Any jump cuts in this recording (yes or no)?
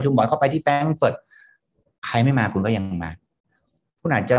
no